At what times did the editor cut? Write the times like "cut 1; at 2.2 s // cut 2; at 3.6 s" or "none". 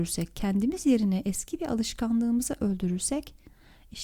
none